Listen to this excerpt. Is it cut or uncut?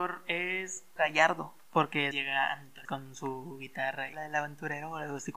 cut